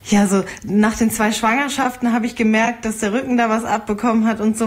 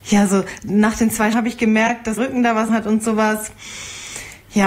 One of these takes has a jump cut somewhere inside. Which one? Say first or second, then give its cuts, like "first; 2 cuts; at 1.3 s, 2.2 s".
second; 3 cuts; at 1.3 s, 2.2 s, 2.7 s